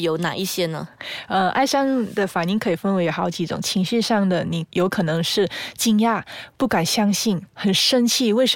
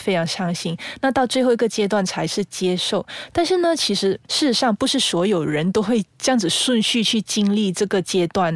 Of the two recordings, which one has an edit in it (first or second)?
second